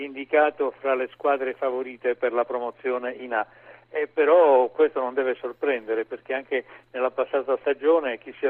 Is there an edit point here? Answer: no; 0 cuts

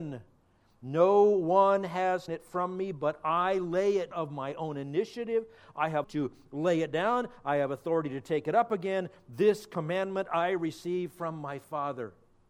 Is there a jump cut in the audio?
yes; 3 cuts; at 2.3 s, 4.1 s, 6.0 s

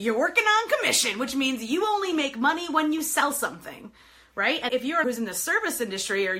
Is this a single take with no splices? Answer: no; 2 cuts; at 4.7 s, 5.0 s

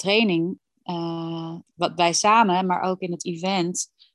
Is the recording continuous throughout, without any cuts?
no; 1 cut; at 1.7 s

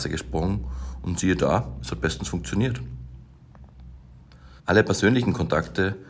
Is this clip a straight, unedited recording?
no; 1 cut; at 4.6 s

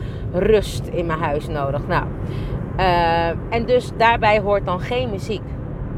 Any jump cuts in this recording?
no; 0 cuts

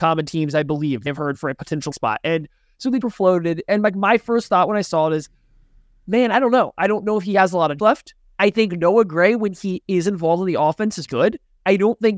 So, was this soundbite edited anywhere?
yes; 5 cuts; at 1.1 s, 1.9 s, 3.0 s, 7.8 s, 11.1 s

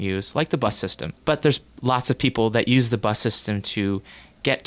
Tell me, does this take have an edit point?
yes; 1 cut; at 1.2 s

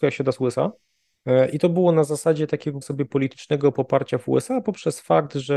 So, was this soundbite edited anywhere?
yes; 1 cut; at 2.8 s

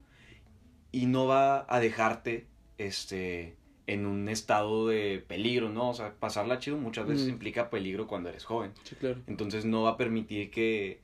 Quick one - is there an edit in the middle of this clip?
no; 0 cuts

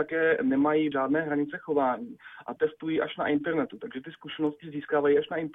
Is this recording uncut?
no; 2 cuts; at 0.9 s, 2.6 s

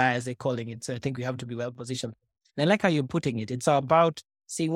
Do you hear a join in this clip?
no; 0 cuts

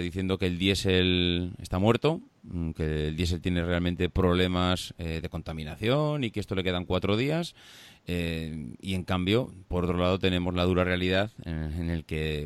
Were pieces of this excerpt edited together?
no; 0 cuts

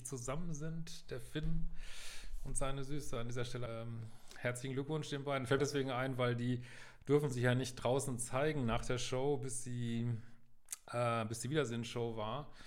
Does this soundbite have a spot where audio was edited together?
yes; 2 cuts; at 3.7 s, 5.6 s

